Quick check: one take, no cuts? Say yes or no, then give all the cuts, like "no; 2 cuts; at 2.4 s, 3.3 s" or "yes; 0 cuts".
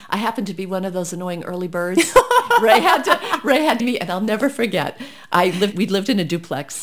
no; 2 cuts; at 3.8 s, 5.7 s